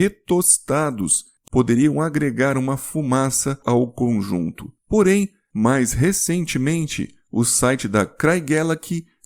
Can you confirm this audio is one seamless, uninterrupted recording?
no; 1 cut; at 1.5 s

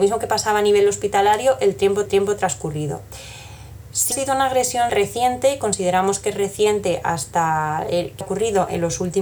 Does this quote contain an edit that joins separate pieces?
yes; 4 cuts; at 2.1 s, 4.1 s, 4.9 s, 8.2 s

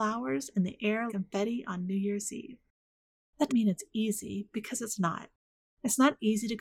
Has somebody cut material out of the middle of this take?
yes; 2 cuts; at 1.1 s, 3.5 s

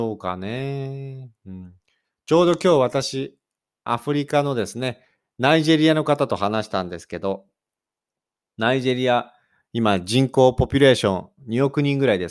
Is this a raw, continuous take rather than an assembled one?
yes; 0 cuts

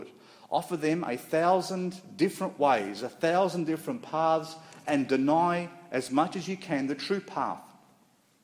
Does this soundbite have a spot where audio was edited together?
no; 0 cuts

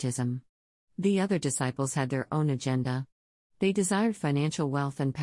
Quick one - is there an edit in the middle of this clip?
no; 0 cuts

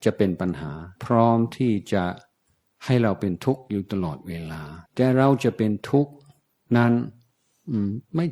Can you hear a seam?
yes; 2 cuts; at 1.0 s, 4.9 s

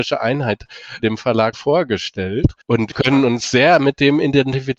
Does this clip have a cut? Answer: yes; 4 cuts; at 1.0 s, 1.5 s, 2.6 s, 2.9 s

